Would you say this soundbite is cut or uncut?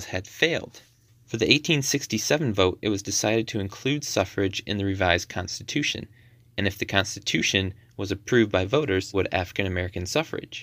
cut